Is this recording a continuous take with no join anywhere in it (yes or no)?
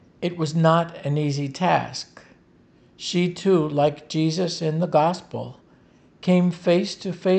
yes